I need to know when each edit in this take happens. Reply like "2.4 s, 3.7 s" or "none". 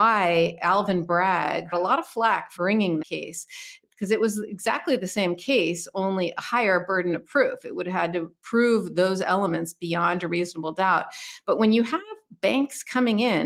1.7 s, 2.6 s, 3.0 s